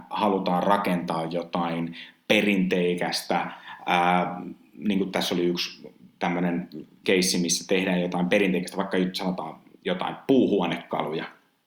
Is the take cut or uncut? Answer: cut